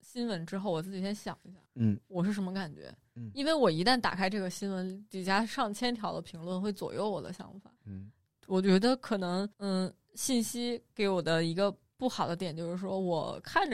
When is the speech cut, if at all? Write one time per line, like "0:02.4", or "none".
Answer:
0:01.7
0:07.8
0:09.5